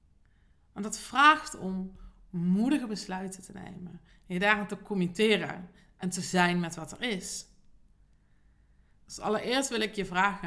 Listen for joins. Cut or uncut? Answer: uncut